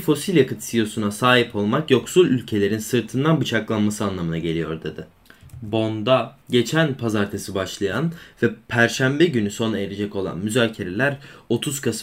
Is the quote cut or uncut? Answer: cut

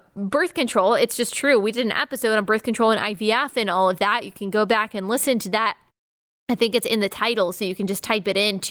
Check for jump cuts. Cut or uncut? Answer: uncut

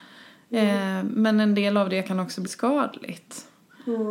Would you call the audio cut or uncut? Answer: cut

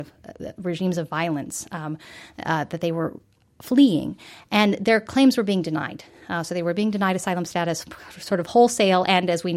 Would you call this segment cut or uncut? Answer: uncut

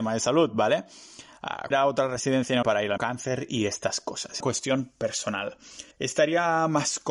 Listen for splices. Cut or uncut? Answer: cut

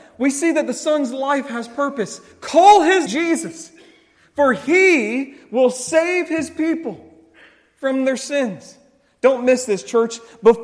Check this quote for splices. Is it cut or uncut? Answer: cut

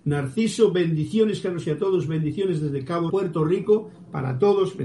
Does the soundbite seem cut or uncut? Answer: cut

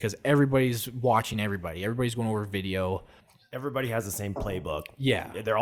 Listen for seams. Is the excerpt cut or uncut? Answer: uncut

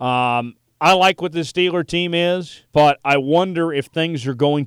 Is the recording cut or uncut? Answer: cut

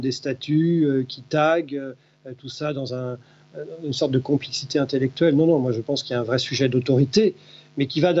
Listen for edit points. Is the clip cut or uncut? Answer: uncut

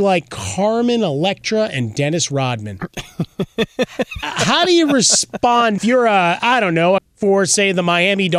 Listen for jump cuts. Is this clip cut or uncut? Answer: cut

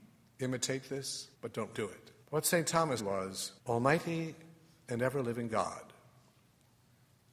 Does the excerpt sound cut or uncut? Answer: cut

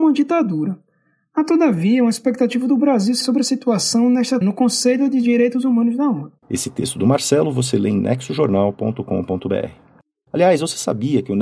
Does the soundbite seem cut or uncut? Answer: cut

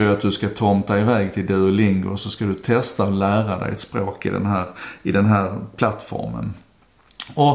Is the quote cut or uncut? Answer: uncut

